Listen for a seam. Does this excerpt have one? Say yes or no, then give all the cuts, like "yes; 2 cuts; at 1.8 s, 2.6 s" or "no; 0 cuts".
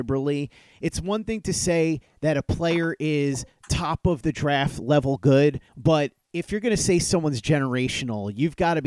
yes; 1 cut; at 5.7 s